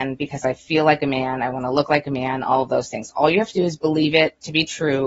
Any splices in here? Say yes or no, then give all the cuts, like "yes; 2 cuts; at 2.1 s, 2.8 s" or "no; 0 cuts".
no; 0 cuts